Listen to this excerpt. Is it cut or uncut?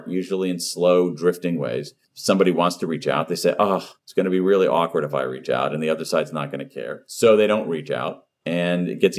cut